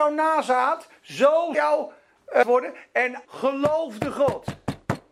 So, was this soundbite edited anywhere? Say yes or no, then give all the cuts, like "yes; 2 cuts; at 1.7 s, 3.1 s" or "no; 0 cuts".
yes; 3 cuts; at 1.5 s, 2.4 s, 3.3 s